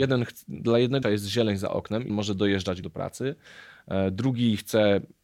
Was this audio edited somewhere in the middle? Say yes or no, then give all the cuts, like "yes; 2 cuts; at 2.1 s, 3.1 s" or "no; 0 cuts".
yes; 3 cuts; at 1.0 s, 2.1 s, 2.8 s